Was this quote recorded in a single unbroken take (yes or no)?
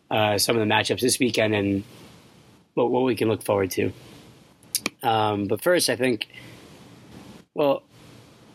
yes